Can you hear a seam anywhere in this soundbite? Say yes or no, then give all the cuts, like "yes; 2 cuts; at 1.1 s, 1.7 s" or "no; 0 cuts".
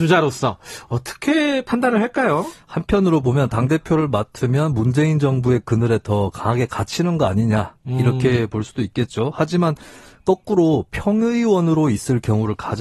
no; 0 cuts